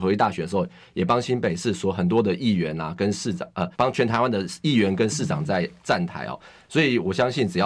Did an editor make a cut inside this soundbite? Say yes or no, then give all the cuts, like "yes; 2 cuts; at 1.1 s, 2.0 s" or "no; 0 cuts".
yes; 1 cut; at 3.7 s